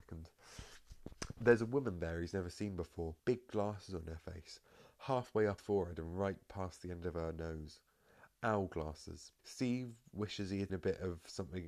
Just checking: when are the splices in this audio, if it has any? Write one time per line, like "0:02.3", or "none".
0:03.2
0:05.6
0:09.4
0:10.7